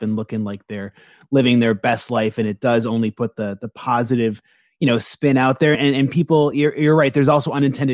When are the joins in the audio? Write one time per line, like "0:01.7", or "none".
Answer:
none